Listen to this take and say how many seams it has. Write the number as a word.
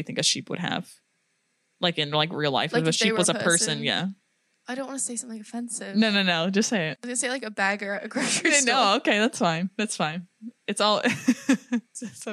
one